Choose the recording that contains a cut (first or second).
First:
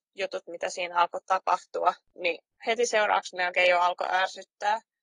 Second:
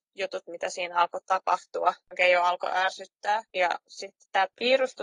second